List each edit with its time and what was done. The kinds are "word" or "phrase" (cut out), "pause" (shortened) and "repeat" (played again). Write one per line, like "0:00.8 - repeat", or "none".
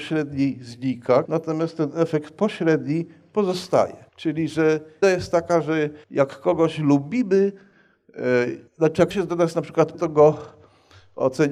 0:01.3 - word
0:04.1 - pause
0:05.0 - word
0:06.0 - pause
0:08.7 - pause
0:09.1 - word
0:09.9 - word